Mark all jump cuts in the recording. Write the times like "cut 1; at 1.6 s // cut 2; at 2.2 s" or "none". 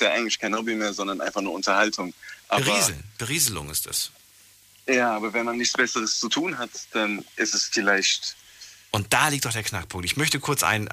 cut 1; at 2.4 s